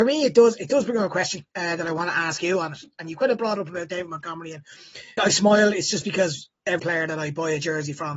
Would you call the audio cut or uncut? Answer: cut